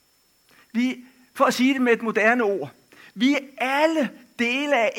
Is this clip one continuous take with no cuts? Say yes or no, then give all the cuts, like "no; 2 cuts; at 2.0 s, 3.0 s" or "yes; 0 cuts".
yes; 0 cuts